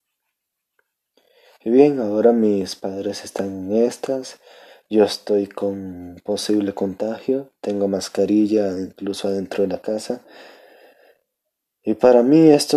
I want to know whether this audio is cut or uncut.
uncut